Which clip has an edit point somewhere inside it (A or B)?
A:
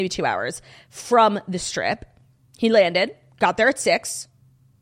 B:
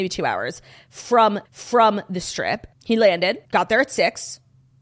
B